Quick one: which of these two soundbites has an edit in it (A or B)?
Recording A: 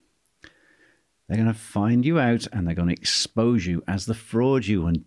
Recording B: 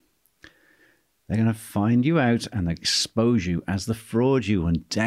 B